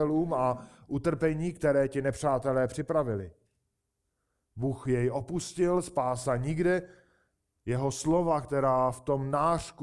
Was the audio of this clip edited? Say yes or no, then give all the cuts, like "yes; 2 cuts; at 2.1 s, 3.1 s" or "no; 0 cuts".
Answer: no; 0 cuts